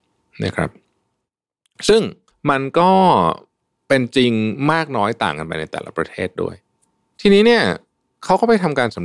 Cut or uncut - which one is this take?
cut